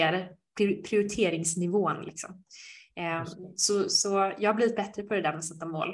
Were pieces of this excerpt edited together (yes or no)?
no